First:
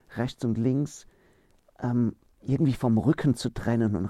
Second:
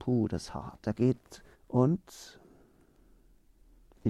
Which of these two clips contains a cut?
second; 2 cuts; at 0.9 s, 1.5 s

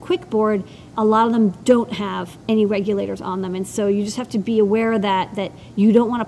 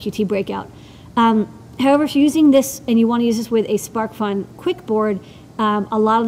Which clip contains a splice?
first; 1 cut; at 0.9 s

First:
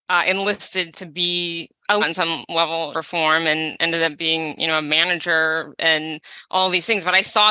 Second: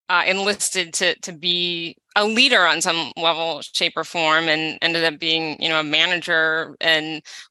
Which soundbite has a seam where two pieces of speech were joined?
first; 3 cuts; at 0.9 s, 2.0 s, 2.9 s

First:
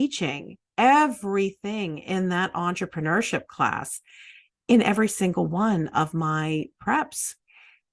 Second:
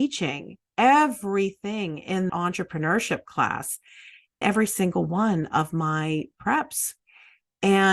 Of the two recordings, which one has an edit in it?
second; 2 cuts; at 2.3 s, 4.4 s

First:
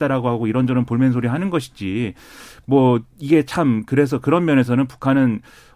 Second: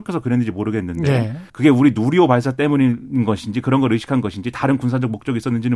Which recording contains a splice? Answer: second; 1 cut; at 1.5 s

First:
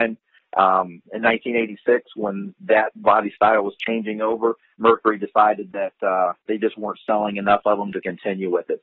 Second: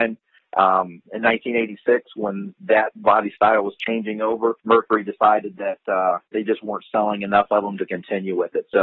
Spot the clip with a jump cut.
second; 1 cut; at 4.6 s

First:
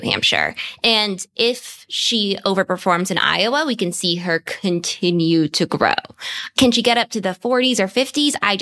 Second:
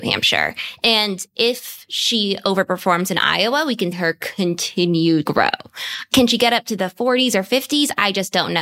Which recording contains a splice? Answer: second; 2 cuts; at 3.9 s, 5.2 s

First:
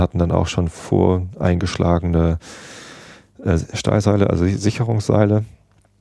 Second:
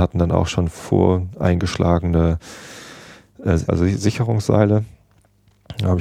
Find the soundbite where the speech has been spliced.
second; 1 cut; at 3.7 s

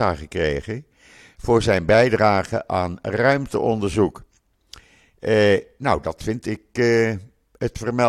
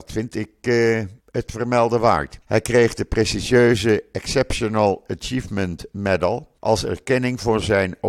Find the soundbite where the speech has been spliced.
second; 3 cuts; at 1.2 s, 2.4 s, 6.6 s

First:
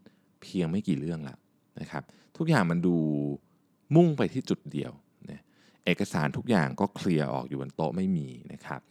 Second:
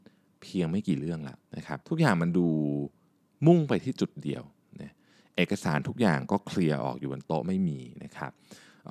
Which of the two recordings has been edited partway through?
second; 2 cuts; at 1.5 s, 1.8 s

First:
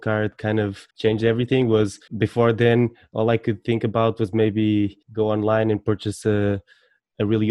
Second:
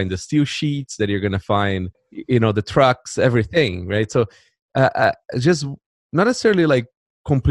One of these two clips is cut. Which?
first; 3 cuts; at 0.9 s, 2.1 s, 5.0 s

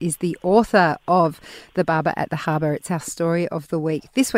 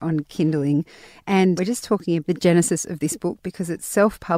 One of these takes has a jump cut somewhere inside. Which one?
second; 2 cuts; at 1.6 s, 2.2 s

